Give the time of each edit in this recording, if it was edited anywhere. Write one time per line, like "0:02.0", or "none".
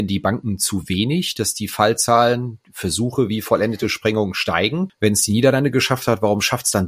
none